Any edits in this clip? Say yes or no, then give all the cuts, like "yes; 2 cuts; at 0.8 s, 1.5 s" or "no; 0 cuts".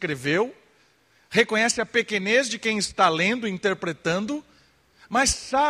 no; 0 cuts